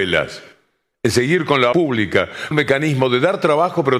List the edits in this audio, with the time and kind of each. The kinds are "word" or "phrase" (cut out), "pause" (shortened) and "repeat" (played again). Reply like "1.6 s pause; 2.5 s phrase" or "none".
1.7 s word; 2.5 s word